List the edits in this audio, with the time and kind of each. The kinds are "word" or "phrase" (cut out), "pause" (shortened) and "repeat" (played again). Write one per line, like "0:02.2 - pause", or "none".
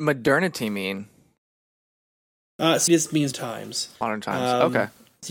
0:02.9 - word
0:03.3 - word
0:04.0 - pause

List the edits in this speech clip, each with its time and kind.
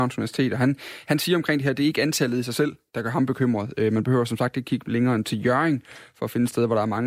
none

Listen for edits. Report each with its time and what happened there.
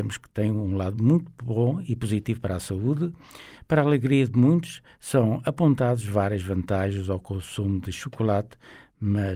none

